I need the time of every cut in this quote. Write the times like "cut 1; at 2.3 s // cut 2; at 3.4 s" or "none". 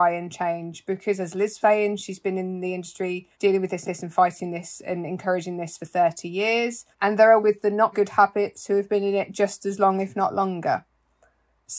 cut 1; at 1.6 s // cut 2; at 3.3 s // cut 3; at 3.8 s // cut 4; at 6.9 s // cut 5; at 7.4 s // cut 6; at 7.9 s